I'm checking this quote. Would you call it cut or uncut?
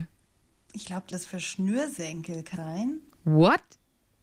cut